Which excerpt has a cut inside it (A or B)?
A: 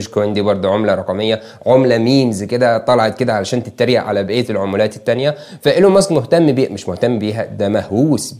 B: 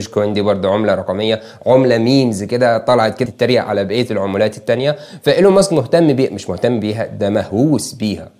B